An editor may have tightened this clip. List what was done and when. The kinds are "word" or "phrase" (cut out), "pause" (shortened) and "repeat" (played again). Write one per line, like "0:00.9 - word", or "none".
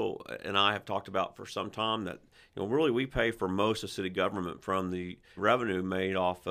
0:05.4 - word